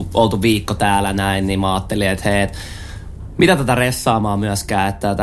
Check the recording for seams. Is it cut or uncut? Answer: uncut